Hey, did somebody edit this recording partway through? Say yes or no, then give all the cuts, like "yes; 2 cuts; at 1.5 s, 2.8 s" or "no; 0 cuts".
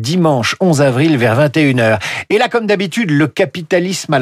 no; 0 cuts